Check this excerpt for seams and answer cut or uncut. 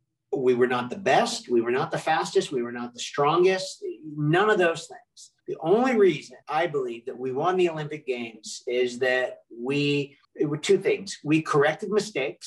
cut